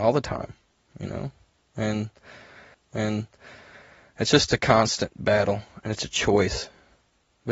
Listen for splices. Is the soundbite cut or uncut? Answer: cut